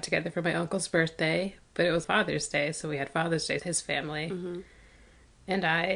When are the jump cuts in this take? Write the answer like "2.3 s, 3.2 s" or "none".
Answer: 2.0 s, 3.6 s